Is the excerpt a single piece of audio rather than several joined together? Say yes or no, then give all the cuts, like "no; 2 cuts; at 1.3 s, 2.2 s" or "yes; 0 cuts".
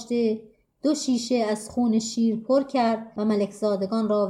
yes; 0 cuts